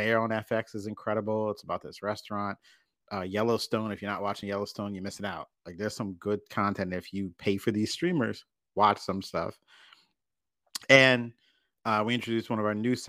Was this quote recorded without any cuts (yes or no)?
yes